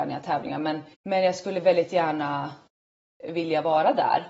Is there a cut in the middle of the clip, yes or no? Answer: yes